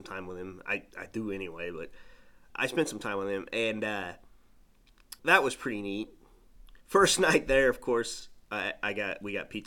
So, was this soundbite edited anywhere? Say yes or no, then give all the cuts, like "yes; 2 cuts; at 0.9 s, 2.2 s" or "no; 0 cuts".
yes; 3 cuts; at 2.5 s, 5.2 s, 6.8 s